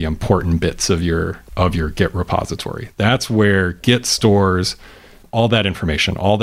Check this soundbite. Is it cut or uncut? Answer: uncut